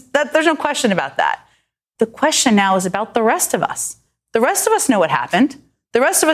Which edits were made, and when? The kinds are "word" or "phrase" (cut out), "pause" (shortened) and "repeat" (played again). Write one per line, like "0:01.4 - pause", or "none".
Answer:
none